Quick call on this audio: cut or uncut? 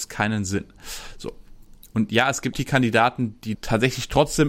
cut